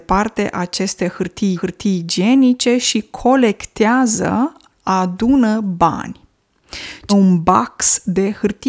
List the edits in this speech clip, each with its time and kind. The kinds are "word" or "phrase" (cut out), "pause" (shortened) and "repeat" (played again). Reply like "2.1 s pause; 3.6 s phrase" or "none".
1.6 s repeat; 7.1 s word